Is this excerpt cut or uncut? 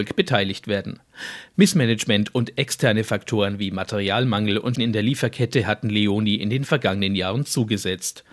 cut